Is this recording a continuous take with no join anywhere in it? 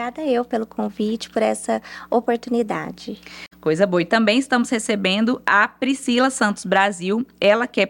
yes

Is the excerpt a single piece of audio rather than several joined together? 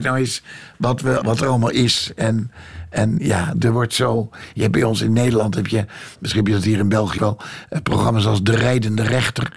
no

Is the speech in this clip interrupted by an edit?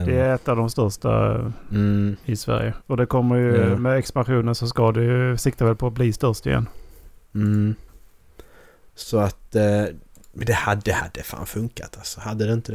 no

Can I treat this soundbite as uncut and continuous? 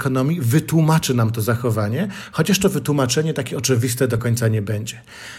yes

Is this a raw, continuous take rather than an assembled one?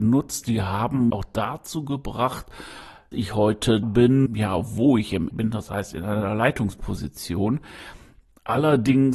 no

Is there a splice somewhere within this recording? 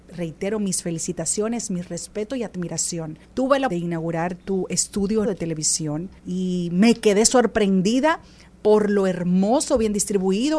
yes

